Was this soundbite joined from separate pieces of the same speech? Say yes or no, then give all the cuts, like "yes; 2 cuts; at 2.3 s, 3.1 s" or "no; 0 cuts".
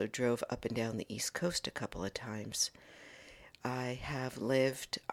no; 0 cuts